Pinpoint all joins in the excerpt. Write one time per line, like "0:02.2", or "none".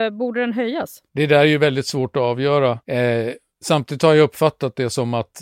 0:01.1
0:02.8

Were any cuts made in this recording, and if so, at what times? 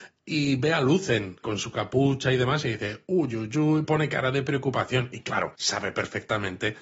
0:01.4
0:03.8
0:05.5

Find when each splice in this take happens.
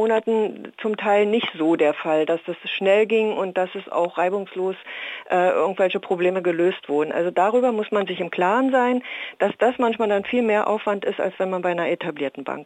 none

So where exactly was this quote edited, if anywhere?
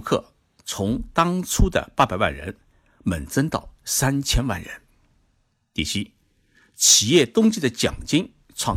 none

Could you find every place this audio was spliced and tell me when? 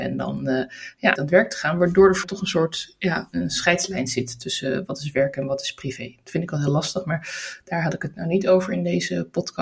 0:01.2
0:02.2

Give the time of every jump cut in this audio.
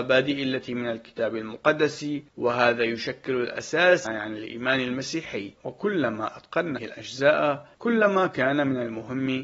0:02.3
0:04.1
0:05.6
0:06.8
0:07.7

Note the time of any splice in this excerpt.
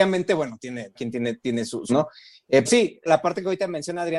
0:00.9
0:01.9
0:02.7
0:03.1

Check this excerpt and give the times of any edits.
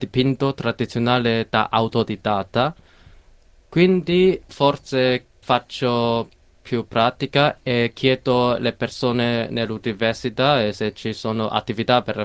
0:04.5
0:05.4

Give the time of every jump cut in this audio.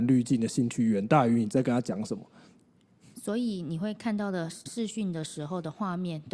0:04.7

